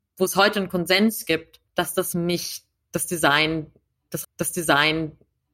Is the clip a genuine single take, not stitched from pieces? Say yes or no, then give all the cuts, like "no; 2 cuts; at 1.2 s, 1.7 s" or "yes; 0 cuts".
no; 3 cuts; at 1.7 s, 2.1 s, 4.2 s